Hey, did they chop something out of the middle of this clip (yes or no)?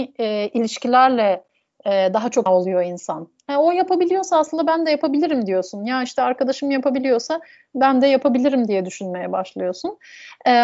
yes